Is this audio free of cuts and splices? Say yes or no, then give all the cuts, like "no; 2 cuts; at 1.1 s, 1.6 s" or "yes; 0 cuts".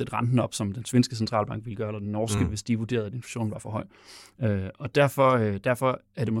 yes; 0 cuts